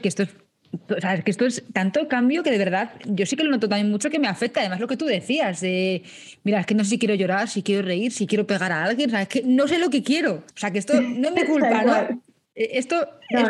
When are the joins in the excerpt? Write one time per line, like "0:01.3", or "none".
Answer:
0:10.5